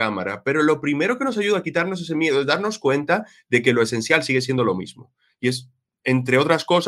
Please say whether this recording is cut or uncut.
uncut